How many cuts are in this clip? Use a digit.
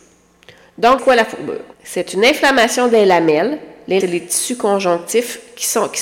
3